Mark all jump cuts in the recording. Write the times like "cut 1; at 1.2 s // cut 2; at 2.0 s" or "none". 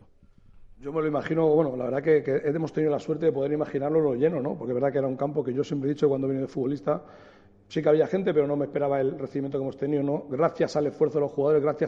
none